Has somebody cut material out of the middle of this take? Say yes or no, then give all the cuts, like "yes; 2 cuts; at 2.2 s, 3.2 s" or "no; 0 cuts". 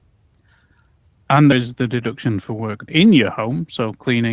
yes; 2 cuts; at 1.5 s, 2.9 s